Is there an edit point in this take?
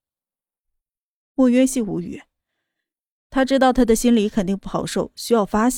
no; 0 cuts

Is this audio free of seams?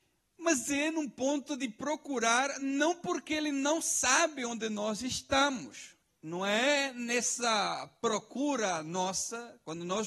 yes; 0 cuts

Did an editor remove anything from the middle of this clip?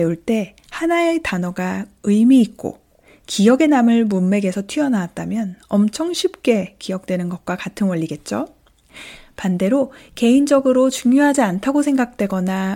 no; 0 cuts

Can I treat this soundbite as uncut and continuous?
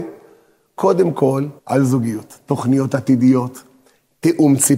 no; 1 cut; at 1.6 s

